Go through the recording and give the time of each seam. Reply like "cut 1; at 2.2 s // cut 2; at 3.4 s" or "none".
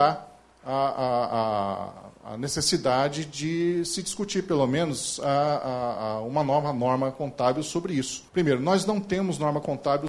cut 1; at 8.3 s